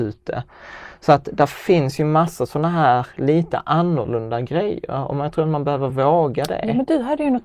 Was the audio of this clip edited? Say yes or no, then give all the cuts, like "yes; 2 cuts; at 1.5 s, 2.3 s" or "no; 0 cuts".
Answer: no; 0 cuts